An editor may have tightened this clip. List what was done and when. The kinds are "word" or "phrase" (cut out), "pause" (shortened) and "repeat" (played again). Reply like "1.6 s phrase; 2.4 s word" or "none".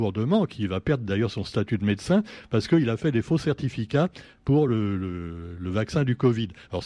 none